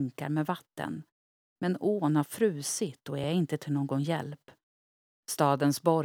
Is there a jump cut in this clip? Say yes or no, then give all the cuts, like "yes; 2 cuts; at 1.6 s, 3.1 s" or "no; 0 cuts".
no; 0 cuts